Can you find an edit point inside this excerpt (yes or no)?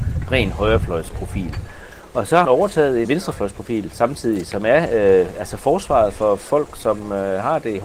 yes